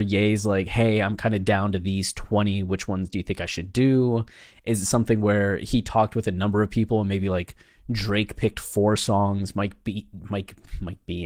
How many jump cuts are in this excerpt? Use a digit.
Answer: 0